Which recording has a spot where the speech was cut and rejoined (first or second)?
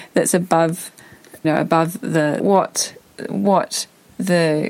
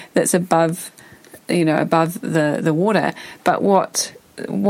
first